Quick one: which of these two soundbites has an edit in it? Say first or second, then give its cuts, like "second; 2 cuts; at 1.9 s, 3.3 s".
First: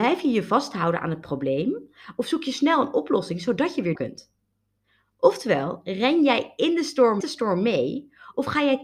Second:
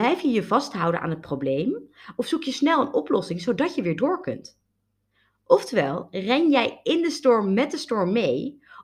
first; 2 cuts; at 3.9 s, 7.2 s